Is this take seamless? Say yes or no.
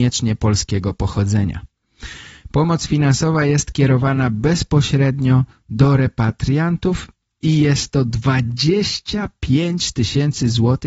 yes